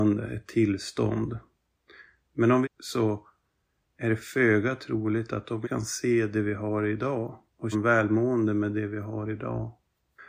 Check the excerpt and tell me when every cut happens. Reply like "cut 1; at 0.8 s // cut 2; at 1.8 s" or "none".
cut 1; at 2.6 s // cut 2; at 5.6 s // cut 3; at 7.7 s

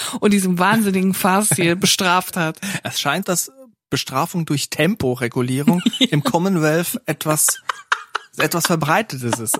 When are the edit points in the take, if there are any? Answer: cut 1; at 3.2 s

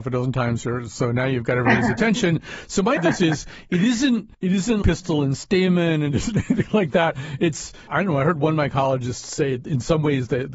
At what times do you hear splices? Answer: cut 1; at 3.0 s // cut 2; at 4.3 s // cut 3; at 4.8 s // cut 4; at 7.9 s

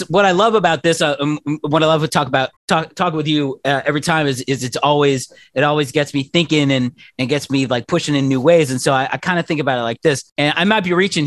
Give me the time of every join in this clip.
cut 1; at 2.6 s // cut 2; at 10.3 s

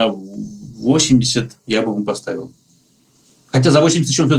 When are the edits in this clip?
cut 1; at 1.6 s

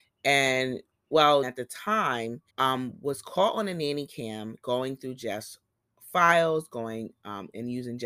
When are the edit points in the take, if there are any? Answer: cut 1; at 1.4 s // cut 2; at 2.5 s

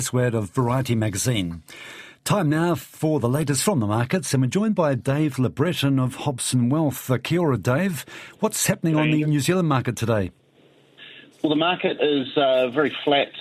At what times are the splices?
none

